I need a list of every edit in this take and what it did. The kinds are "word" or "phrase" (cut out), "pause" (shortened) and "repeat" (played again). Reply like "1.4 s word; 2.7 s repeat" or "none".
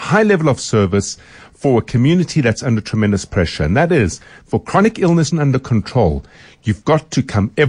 5.3 s phrase